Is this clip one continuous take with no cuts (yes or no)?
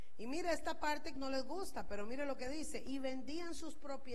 no